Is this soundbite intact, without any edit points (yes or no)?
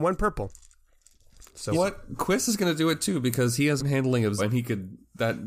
no